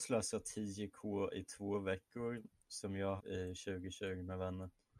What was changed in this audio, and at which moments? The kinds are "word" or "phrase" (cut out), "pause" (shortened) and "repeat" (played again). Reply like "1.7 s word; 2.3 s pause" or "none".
3.2 s phrase